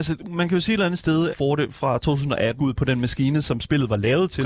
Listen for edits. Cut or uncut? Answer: cut